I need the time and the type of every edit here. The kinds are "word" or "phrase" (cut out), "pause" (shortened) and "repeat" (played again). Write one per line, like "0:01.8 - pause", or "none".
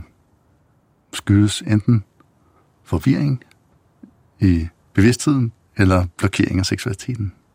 none